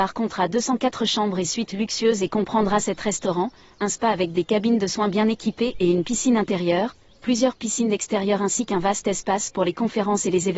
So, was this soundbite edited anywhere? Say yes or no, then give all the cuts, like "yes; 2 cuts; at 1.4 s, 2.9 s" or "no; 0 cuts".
no; 0 cuts